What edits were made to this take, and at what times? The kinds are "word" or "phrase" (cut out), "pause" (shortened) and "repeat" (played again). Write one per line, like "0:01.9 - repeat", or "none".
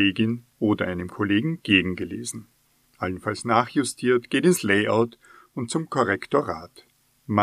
none

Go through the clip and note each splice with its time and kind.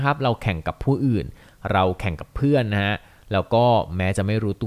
none

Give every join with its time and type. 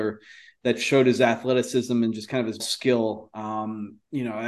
0:02.6 - word

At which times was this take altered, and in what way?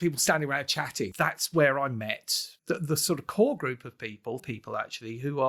0:04.4 - phrase

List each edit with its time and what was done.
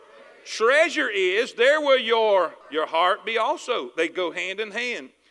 0:02.6 - pause

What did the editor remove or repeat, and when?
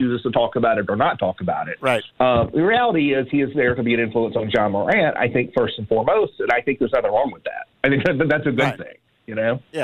0:02.1 - pause

